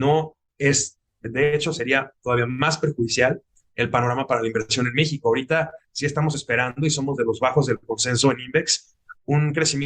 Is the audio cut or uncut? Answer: uncut